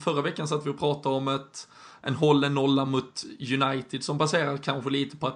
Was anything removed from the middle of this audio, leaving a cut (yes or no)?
no